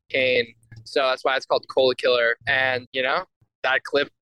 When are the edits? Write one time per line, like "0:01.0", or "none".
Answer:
0:02.4

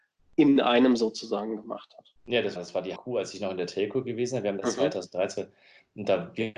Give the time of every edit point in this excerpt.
0:02.2
0:02.6
0:03.0

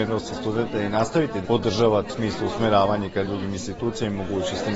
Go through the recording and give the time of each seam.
0:01.4
0:02.1
0:03.3

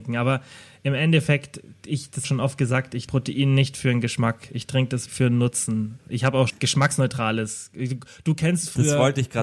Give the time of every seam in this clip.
0:02.2
0:03.1
0:05.1
0:06.5

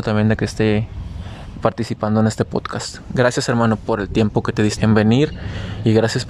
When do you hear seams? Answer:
0:04.8

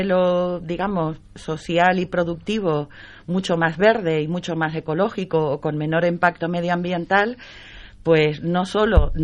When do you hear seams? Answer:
none

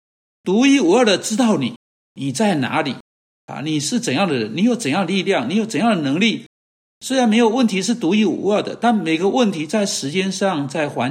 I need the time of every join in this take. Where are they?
none

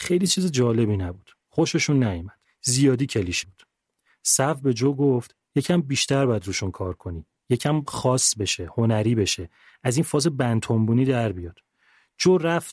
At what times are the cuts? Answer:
0:03.4

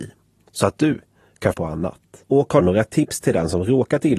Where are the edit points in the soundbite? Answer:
0:01.5
0:02.2
0:02.6

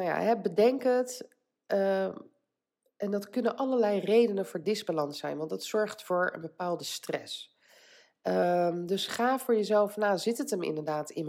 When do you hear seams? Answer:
none

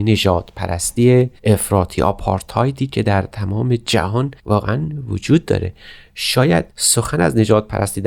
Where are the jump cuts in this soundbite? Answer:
0:01.4
0:04.4
0:06.7

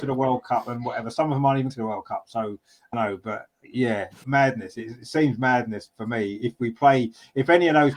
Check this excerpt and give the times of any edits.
0:01.7
0:02.9
0:04.2

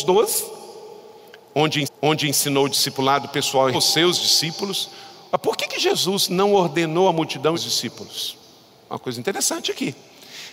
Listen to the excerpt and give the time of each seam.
0:01.8
0:03.7
0:07.5

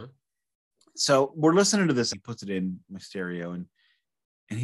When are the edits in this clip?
0:02.1
0:02.8

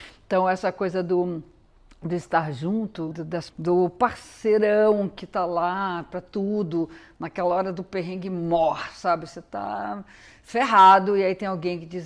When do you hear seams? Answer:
0:03.1
0:03.5

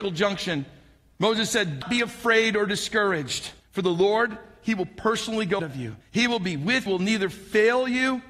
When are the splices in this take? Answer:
0:01.8
0:03.6
0:05.6
0:06.0
0:06.9

